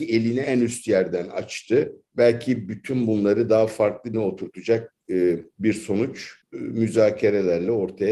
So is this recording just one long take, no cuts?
no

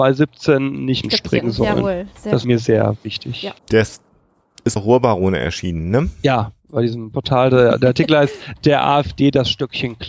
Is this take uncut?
no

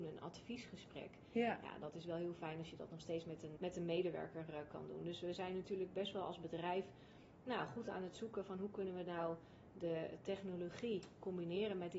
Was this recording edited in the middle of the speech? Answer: yes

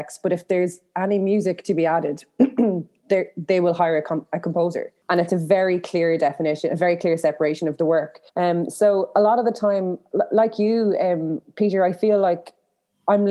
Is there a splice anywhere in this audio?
yes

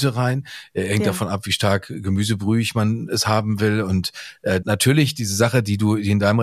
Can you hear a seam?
yes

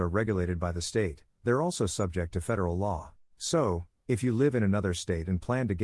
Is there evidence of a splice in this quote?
yes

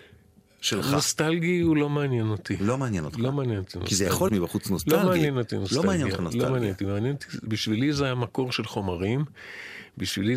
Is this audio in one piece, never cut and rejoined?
no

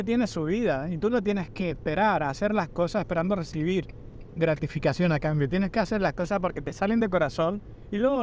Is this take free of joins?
yes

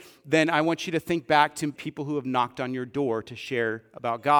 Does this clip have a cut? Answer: yes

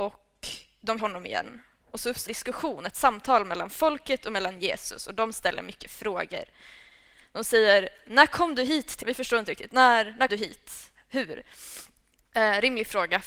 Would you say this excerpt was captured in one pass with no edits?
no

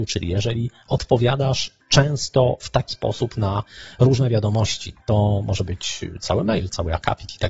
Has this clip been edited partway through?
yes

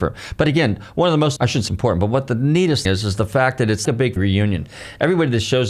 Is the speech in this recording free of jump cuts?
no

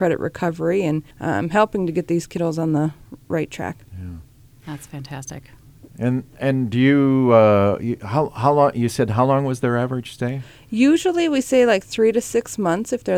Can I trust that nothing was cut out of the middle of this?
no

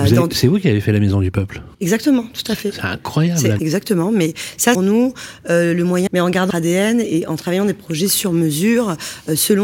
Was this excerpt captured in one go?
no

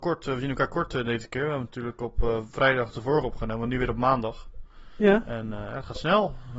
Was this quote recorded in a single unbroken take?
yes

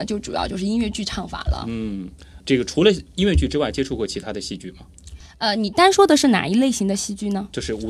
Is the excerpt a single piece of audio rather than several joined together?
no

